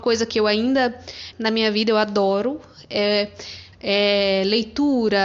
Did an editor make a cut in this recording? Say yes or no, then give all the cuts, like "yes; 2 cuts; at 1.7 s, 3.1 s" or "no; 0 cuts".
yes; 2 cuts; at 1.3 s, 3.7 s